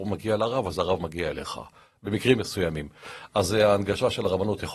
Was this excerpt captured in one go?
yes; 0 cuts

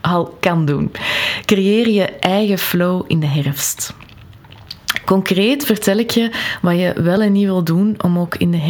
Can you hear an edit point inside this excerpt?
no; 0 cuts

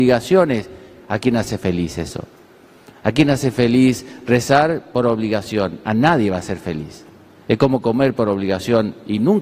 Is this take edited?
no; 0 cuts

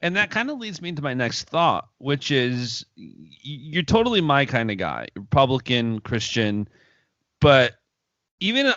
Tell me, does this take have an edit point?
no; 0 cuts

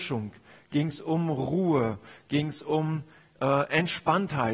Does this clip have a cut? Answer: no; 0 cuts

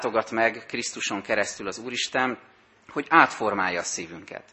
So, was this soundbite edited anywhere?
no; 0 cuts

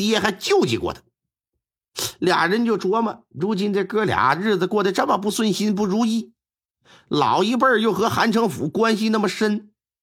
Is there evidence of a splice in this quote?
no; 0 cuts

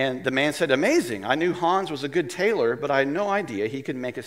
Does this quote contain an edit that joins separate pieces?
no; 0 cuts

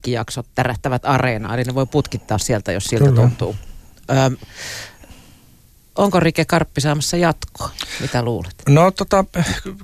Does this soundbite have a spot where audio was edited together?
no; 0 cuts

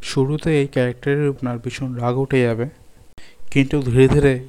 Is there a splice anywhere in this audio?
yes; 1 cut; at 1.4 s

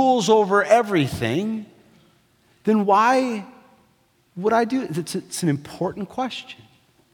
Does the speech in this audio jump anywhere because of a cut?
no; 0 cuts

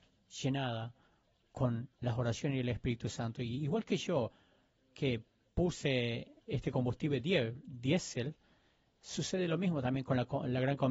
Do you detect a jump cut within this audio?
no; 0 cuts

